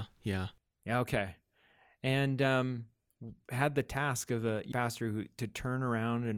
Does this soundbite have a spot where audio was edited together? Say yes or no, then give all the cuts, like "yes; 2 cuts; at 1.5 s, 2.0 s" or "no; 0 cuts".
yes; 1 cut; at 4.7 s